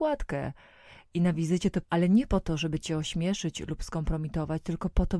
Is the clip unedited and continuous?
no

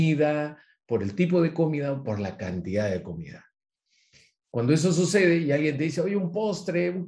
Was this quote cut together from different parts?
no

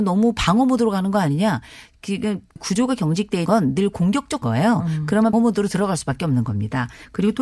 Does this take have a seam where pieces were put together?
yes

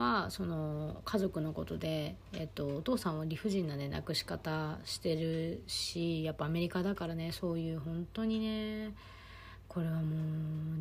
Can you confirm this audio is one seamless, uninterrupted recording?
yes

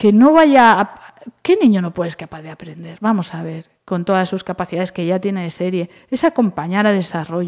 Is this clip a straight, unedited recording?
yes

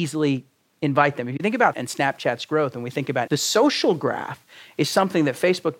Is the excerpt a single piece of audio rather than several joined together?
no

